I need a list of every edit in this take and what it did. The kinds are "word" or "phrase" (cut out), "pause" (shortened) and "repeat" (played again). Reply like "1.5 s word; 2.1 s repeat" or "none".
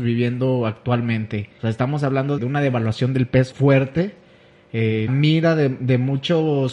1.6 s pause; 2.4 s word; 3.5 s word; 5.1 s word